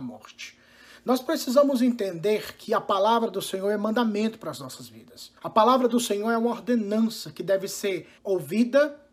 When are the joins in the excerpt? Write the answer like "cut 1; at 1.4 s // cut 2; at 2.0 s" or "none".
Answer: cut 1; at 5.4 s // cut 2; at 8.2 s

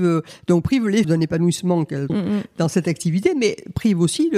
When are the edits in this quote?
cut 1; at 1.0 s // cut 2; at 2.1 s

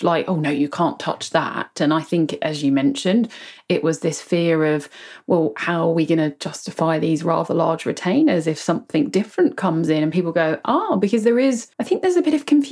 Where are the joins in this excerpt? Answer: cut 1; at 11.7 s

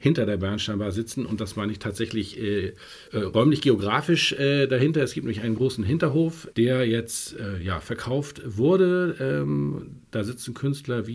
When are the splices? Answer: cut 1; at 3.1 s // cut 2; at 6.5 s

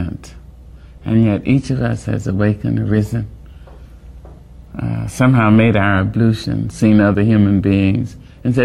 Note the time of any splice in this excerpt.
none

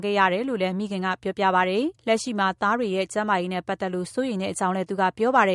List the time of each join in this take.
cut 1; at 2.0 s

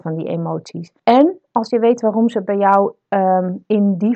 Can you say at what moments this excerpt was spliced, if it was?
cut 1; at 1.0 s

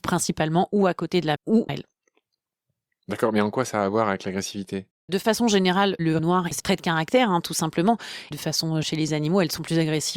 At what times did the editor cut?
cut 1; at 1.4 s // cut 2; at 1.7 s // cut 3; at 5.1 s // cut 4; at 6.2 s // cut 5; at 6.6 s // cut 6; at 8.3 s // cut 7; at 8.8 s

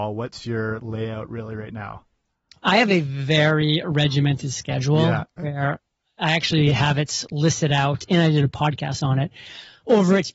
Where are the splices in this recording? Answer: none

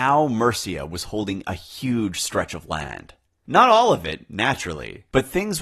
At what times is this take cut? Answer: none

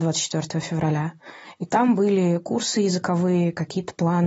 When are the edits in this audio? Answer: none

